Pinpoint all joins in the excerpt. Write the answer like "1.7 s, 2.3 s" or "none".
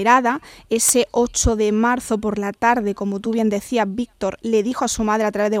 none

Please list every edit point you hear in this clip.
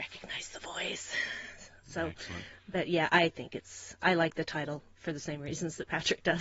4.0 s

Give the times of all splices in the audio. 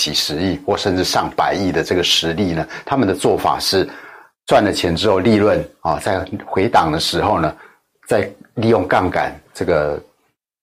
none

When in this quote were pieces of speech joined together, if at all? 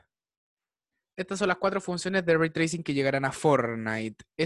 none

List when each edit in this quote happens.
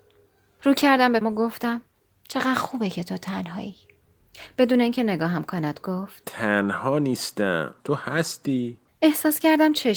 1.2 s, 7.8 s

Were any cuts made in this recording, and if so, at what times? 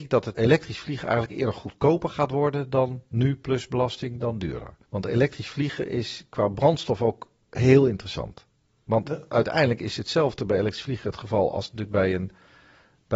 none

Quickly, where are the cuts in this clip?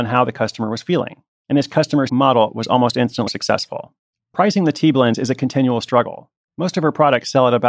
2.1 s, 3.3 s

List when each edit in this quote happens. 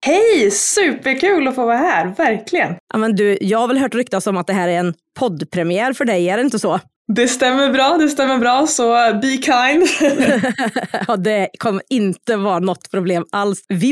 2.8 s

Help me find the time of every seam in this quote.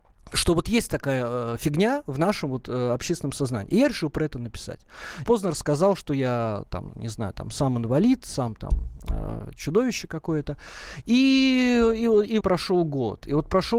5.2 s, 12.4 s

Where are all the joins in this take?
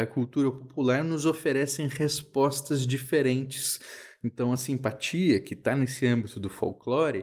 none

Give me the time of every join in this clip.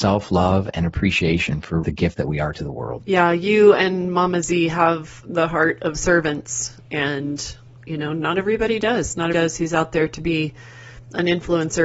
1.8 s, 7.8 s, 9.3 s

